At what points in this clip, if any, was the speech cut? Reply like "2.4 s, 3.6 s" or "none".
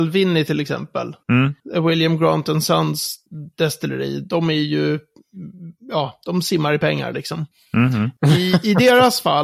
none